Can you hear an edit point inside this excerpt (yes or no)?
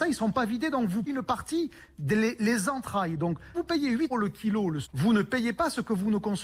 yes